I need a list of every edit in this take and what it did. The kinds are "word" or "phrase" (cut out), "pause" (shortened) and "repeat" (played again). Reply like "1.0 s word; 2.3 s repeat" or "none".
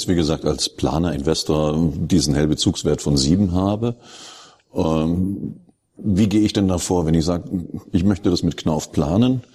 none